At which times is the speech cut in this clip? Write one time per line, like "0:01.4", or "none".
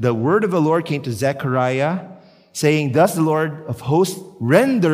none

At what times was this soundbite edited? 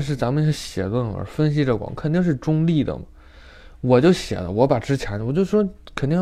none

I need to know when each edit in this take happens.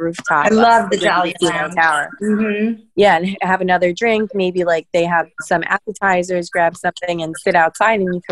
0:02.9

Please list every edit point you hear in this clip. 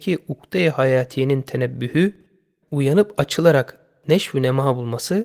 0:02.6

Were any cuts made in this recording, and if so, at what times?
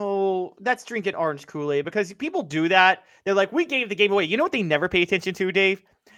none

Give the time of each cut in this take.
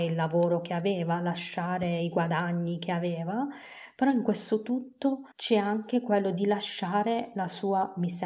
0:05.3

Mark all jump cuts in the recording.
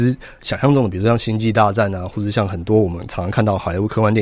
none

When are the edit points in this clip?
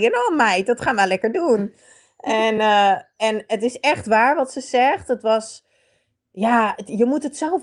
none

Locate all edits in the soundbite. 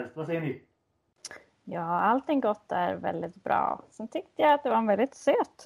none

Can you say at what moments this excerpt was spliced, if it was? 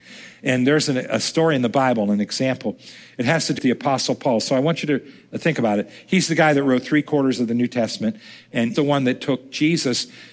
0:03.6
0:08.7

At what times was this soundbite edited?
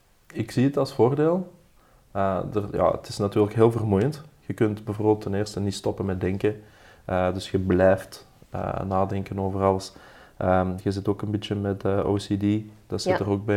none

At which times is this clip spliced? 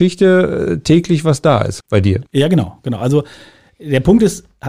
0:01.8
0:02.3

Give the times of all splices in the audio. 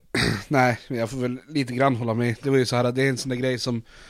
none

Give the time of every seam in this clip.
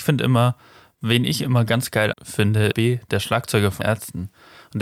0:02.1
0:02.7
0:03.8

